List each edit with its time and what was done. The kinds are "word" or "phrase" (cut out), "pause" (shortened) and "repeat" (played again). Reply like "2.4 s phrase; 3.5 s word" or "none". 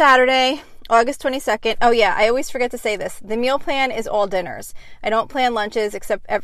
none